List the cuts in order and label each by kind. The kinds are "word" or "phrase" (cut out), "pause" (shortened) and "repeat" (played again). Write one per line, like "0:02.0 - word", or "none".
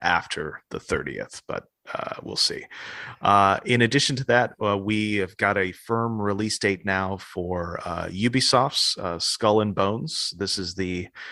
none